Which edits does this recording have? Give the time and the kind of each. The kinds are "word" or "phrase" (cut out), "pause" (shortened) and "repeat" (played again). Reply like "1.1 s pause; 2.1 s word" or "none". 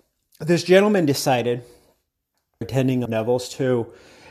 2.6 s word; 3.1 s phrase